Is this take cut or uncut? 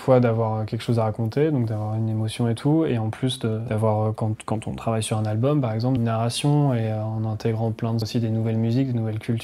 cut